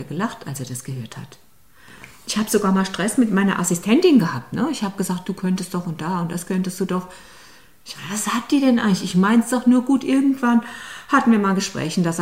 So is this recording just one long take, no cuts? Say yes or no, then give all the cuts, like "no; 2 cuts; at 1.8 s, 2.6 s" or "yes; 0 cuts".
yes; 0 cuts